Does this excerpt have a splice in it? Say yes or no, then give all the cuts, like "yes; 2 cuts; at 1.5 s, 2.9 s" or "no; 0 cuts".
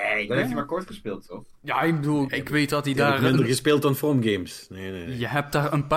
yes; 1 cut; at 2.3 s